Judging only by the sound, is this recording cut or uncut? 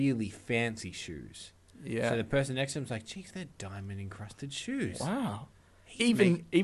uncut